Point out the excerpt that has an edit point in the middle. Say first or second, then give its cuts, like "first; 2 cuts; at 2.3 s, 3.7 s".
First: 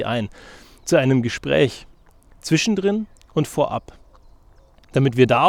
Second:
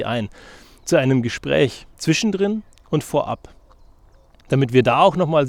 second; 1 cut; at 1.9 s